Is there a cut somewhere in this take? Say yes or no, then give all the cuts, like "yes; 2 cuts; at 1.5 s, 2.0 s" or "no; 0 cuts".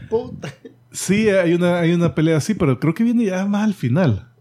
no; 0 cuts